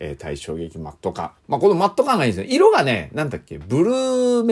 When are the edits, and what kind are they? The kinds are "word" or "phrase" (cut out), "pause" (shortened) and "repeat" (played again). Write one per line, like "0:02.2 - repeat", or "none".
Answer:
0:01.4 - pause